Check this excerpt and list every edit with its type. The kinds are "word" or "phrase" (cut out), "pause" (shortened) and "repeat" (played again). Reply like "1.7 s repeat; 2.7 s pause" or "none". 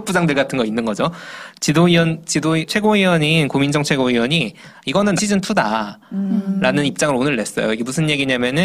2.7 s word; 5.2 s word